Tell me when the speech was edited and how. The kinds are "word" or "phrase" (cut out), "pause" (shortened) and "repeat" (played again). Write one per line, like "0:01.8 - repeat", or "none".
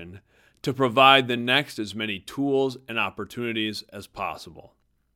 none